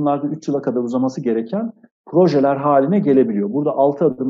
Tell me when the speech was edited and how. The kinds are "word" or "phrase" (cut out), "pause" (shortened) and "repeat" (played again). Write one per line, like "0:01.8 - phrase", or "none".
none